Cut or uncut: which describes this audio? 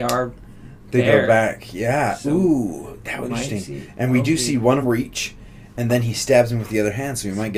cut